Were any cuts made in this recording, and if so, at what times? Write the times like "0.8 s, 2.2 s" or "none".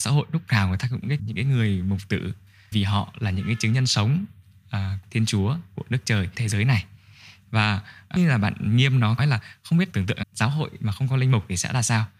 1.2 s, 2.7 s, 5.0 s, 6.3 s, 8.2 s, 9.2 s, 9.9 s, 10.2 s